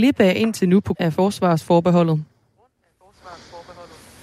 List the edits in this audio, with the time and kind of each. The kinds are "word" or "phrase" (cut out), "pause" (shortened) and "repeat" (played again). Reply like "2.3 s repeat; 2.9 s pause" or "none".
0.9 s word